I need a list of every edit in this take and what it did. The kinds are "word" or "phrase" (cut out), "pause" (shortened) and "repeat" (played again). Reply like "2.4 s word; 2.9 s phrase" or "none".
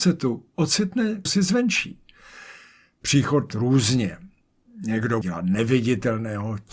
1.3 s word; 3.5 s phrase; 5.2 s word

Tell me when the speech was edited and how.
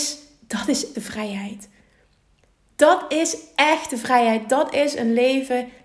0.9 s word

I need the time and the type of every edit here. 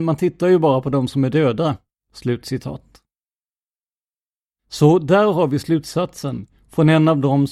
2.0 s pause

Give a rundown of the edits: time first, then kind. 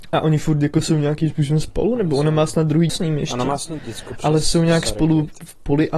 2.9 s word; 3.8 s word

